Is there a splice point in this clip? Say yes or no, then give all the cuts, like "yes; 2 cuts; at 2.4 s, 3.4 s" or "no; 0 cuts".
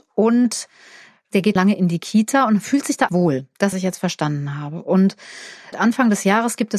yes; 4 cuts; at 1.6 s, 3.1 s, 3.7 s, 5.7 s